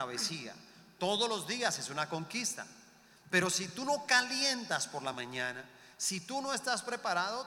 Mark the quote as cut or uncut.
uncut